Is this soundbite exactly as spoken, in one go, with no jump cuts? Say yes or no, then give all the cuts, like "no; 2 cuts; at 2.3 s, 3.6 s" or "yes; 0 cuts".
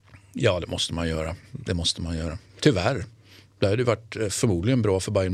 yes; 0 cuts